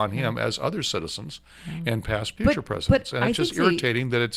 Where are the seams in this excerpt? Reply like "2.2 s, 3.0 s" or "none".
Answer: 2.4 s